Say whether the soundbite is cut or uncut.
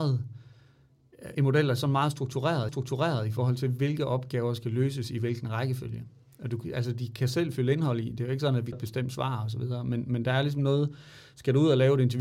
cut